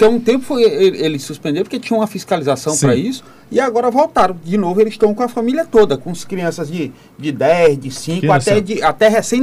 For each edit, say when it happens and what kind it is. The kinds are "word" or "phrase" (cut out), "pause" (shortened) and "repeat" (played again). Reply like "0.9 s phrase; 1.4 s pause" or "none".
none